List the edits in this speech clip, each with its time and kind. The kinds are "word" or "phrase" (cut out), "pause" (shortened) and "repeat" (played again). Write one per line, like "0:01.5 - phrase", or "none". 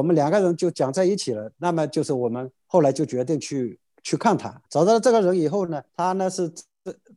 0:02.6 - pause
0:04.6 - pause
0:05.9 - pause

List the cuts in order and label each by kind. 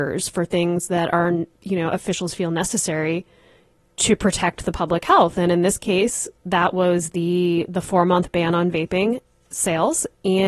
0:01.5 - pause
0:06.4 - pause

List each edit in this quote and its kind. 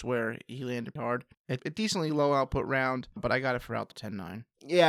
0:01.0 - word
0:01.6 - word
0:03.2 - word
0:03.9 - word

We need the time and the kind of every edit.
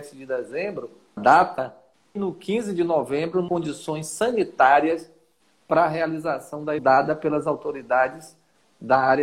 0:01.2 - word
0:02.2 - word
0:03.5 - word
0:06.8 - word

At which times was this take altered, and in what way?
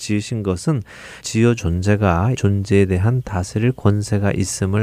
0:01.2 - word
0:01.6 - word
0:02.4 - phrase

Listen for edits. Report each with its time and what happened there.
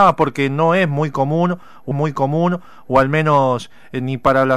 0:01.9 - repeat

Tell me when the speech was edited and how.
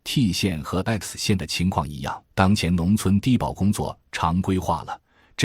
0:02.3 - pause

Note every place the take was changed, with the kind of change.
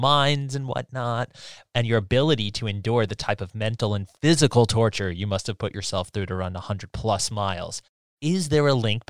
none

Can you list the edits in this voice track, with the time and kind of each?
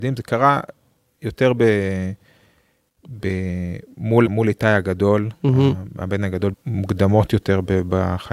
0:04.3 - word
0:06.5 - word

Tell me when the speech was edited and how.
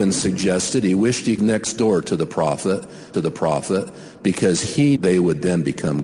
0:01.4 - phrase
0:03.1 - repeat
0:05.0 - word

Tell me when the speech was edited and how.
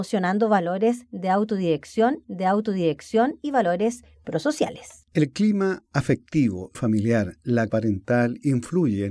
0:02.2 - repeat
0:05.1 - pause
0:06.7 - phrase
0:07.7 - word

